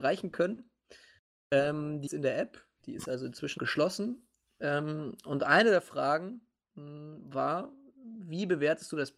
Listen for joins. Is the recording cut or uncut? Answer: cut